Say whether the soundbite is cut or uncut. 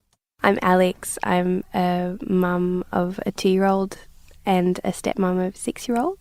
uncut